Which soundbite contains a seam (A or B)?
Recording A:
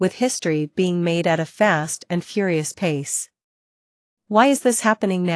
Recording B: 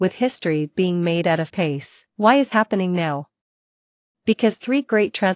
B